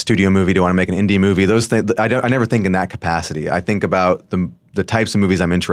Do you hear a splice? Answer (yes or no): no